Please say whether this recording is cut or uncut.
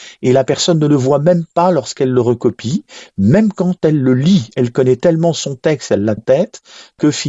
cut